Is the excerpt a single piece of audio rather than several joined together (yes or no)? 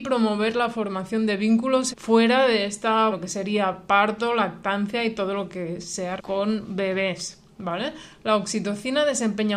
no